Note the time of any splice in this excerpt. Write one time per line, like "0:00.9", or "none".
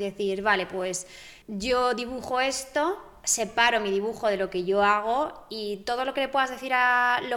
0:01.4